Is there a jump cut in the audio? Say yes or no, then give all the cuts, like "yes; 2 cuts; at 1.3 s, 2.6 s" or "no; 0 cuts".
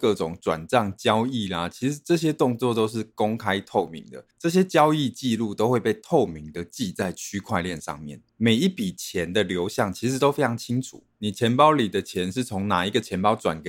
yes; 3 cuts; at 4.3 s, 8.3 s, 11.1 s